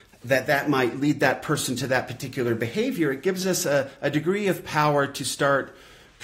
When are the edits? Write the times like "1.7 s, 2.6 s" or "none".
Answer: none